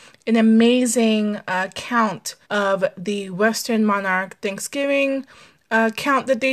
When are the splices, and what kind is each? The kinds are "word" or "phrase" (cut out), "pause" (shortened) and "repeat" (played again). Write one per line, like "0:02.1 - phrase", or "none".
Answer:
0:02.4 - pause